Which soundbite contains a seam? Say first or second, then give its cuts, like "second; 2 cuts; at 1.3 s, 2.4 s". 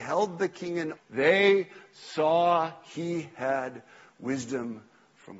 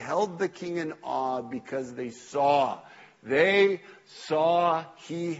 first; 1 cut; at 1.0 s